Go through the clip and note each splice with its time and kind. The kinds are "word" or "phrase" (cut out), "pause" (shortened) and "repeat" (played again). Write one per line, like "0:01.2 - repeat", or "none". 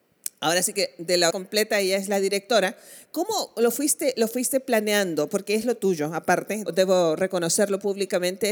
0:01.3 - word
0:06.7 - word